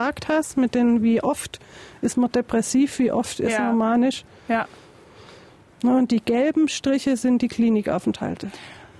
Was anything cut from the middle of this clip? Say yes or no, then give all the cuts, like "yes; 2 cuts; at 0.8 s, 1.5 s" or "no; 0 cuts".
no; 0 cuts